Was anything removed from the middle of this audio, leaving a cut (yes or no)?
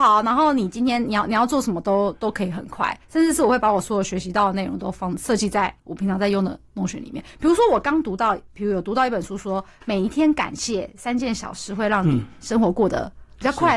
yes